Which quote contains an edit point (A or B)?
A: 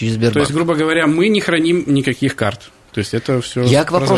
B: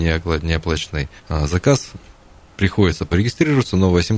B